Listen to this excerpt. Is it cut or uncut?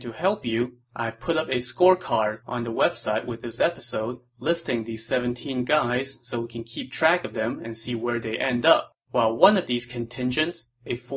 cut